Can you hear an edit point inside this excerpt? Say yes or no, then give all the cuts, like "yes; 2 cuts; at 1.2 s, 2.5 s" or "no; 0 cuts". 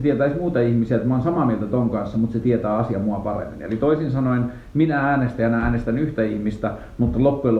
no; 0 cuts